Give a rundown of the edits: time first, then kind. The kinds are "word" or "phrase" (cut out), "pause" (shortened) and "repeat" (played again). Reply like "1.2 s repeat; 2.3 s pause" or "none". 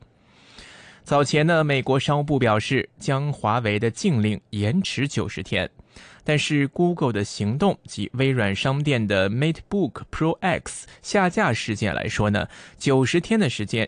none